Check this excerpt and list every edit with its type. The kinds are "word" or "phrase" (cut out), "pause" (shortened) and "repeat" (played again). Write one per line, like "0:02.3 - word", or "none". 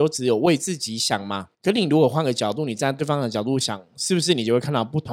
0:01.5 - pause